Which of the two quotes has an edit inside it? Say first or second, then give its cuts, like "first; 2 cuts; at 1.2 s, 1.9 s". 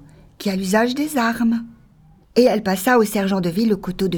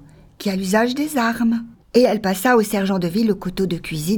second; 1 cut; at 1.7 s